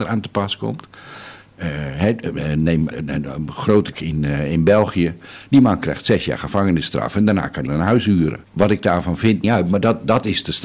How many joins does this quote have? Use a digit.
5